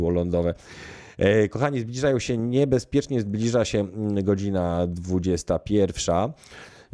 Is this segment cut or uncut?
uncut